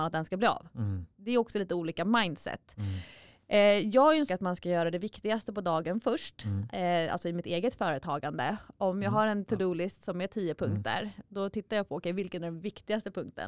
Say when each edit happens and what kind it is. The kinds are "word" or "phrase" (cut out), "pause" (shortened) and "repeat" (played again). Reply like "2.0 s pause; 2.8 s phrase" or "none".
4.3 s phrase